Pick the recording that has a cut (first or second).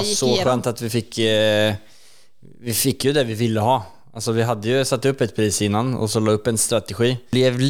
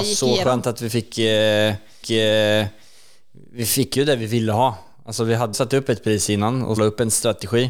second